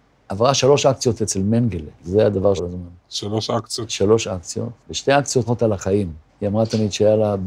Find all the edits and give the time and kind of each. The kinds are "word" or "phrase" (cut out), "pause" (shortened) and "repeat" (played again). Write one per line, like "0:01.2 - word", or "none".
0:01.9 - pause
0:02.6 - phrase
0:04.8 - pause
0:05.5 - phrase
0:06.3 - pause